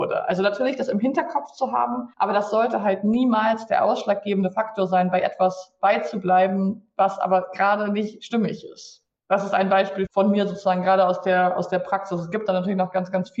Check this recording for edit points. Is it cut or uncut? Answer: cut